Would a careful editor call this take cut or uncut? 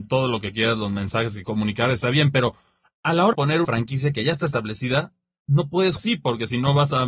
cut